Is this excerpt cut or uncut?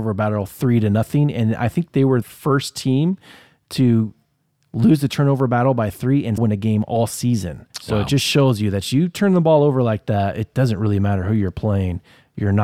cut